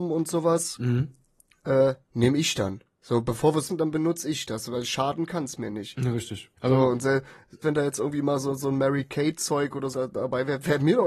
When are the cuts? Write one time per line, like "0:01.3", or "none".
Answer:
0:02.0
0:02.9
0:03.7
0:06.6
0:07.6
0:09.9